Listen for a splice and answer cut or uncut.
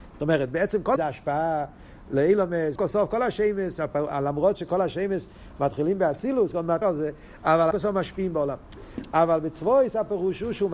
cut